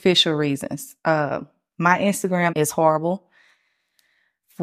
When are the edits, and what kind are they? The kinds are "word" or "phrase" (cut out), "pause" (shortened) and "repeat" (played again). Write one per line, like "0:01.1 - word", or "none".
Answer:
0:02.5 - word